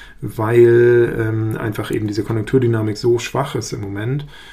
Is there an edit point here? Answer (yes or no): no